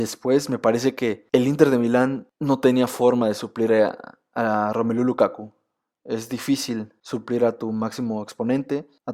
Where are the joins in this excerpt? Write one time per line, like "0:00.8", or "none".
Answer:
none